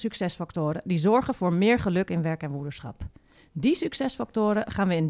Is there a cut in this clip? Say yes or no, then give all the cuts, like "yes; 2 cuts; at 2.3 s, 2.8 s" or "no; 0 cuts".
no; 0 cuts